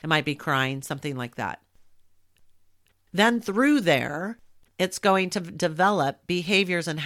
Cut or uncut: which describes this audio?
uncut